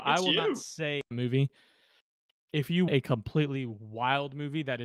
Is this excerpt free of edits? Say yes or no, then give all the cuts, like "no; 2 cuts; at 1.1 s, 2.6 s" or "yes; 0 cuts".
no; 2 cuts; at 1.1 s, 2.9 s